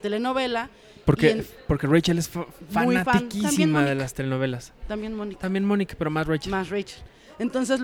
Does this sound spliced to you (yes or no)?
no